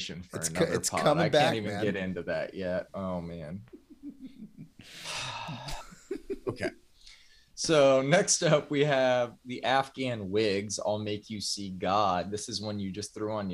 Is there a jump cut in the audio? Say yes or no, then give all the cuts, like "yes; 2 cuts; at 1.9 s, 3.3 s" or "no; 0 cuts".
no; 0 cuts